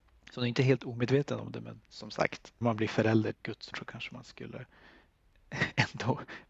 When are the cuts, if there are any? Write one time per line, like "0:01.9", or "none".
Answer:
0:01.8
0:02.6
0:03.3
0:03.7